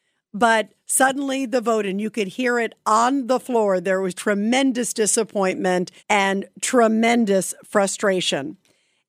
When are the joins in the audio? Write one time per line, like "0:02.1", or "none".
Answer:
0:04.1
0:06.0